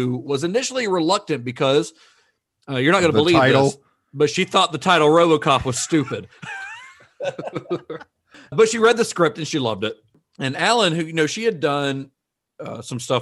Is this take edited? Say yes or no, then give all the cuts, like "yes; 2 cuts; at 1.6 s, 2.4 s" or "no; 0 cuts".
yes; 1 cut; at 8.5 s